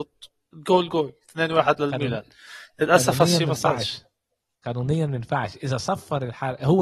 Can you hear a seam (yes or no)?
no